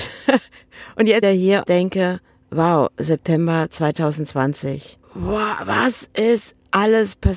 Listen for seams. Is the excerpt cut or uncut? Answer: cut